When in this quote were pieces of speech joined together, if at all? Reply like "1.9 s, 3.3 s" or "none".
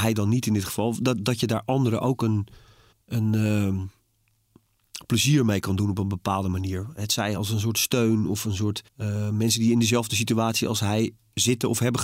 2.9 s, 8.9 s

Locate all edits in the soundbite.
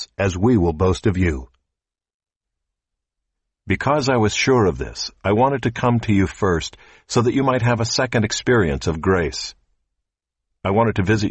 none

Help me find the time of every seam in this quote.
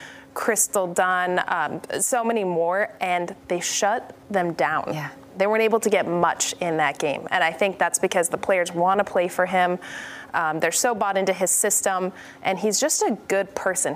none

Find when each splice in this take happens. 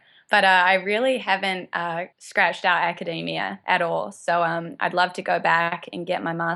2.1 s

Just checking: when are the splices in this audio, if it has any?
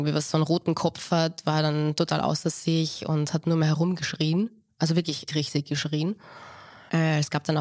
5.3 s

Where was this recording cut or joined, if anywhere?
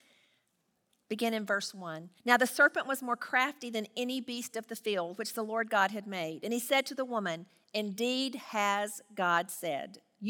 2.2 s

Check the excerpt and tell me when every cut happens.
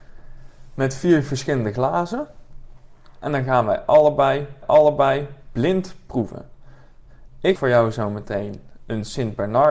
4.6 s, 7.6 s

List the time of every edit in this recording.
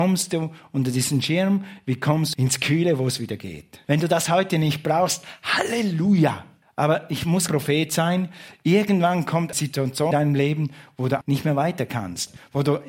2.3 s, 3.8 s, 6.6 s, 7.5 s, 9.5 s, 10.1 s, 11.2 s

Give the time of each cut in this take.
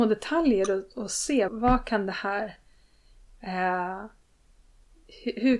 1.5 s

